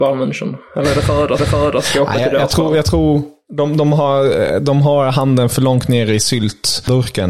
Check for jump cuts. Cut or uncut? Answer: cut